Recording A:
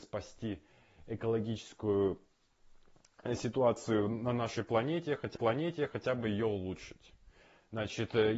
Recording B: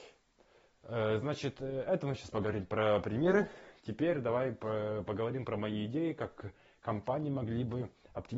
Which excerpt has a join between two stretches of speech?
A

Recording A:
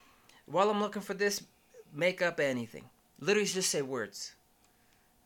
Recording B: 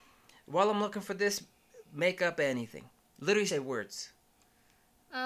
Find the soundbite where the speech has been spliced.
B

